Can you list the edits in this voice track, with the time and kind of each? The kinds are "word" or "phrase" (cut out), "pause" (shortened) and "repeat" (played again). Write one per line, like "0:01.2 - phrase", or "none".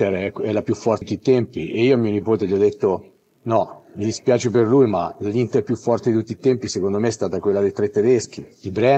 0:01.0 - word